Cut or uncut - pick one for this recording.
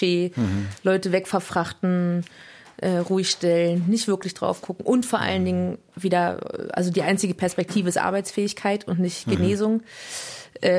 uncut